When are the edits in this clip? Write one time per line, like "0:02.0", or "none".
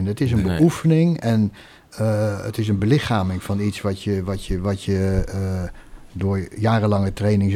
none